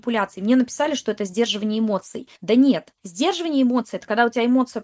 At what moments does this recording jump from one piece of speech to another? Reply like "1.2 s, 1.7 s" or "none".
2.3 s, 3.0 s